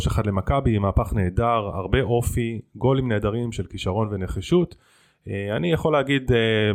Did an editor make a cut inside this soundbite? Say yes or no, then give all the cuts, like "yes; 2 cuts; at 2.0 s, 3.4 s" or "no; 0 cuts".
no; 0 cuts